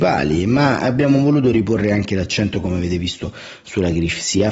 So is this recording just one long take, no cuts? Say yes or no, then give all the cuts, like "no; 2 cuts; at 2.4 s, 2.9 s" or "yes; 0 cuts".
yes; 0 cuts